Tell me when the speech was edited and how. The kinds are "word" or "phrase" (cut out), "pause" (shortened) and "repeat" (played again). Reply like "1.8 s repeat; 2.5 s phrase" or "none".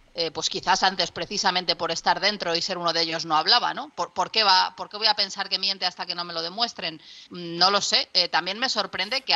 7.3 s pause